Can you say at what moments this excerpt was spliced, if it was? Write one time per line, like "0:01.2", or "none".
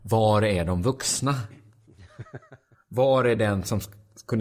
none